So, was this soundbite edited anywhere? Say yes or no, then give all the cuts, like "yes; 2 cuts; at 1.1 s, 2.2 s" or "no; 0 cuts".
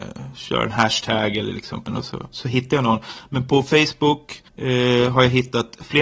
yes; 2 cuts; at 1.9 s, 4.5 s